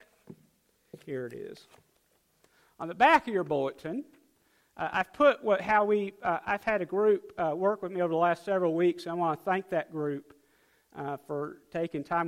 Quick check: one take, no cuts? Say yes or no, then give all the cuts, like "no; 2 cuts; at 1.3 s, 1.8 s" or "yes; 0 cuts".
yes; 0 cuts